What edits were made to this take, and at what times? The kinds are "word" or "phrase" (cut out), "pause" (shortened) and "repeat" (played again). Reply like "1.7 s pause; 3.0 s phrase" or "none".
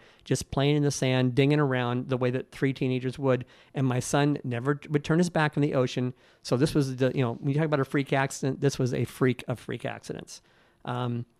none